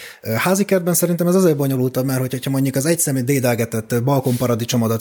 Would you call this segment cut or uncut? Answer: uncut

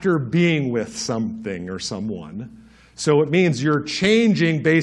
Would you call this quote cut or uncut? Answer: uncut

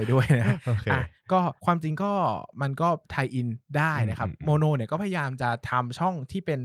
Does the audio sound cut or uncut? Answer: cut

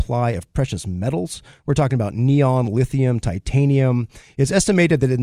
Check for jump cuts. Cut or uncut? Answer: uncut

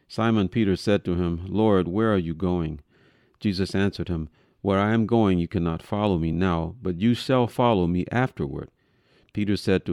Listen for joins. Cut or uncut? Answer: uncut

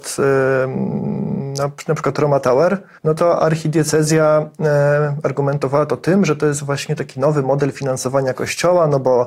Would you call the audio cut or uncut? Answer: cut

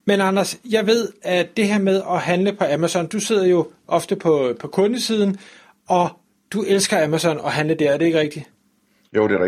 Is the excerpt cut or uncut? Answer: uncut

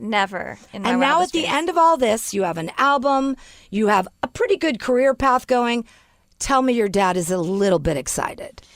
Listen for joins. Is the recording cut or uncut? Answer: uncut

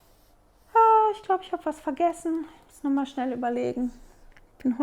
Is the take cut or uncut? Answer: uncut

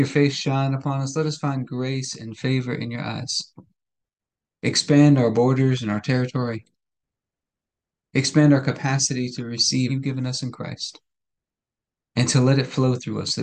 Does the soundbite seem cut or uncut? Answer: cut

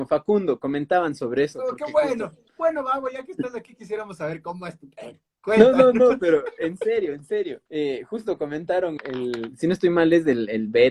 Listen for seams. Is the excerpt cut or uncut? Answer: cut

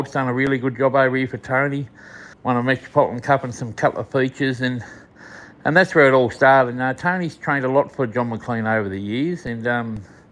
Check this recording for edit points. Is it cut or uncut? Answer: cut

